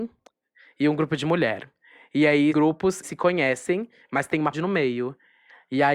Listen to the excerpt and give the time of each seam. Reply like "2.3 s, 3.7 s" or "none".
2.5 s, 3.0 s, 4.5 s